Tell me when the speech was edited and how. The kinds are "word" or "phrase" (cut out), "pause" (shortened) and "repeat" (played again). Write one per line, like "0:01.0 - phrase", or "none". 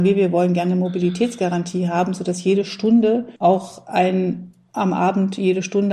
0:03.4 - pause